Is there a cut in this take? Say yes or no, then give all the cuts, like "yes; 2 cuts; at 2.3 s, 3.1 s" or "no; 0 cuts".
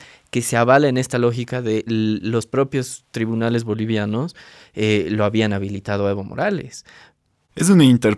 no; 0 cuts